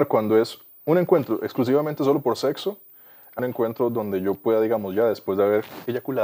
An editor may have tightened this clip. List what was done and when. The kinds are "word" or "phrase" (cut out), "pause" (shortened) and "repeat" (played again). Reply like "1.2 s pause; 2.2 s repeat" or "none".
3.4 s word